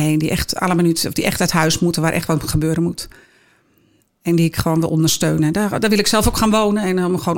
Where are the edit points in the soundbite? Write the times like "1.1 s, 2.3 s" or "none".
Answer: none